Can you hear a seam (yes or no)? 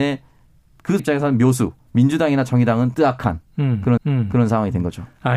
yes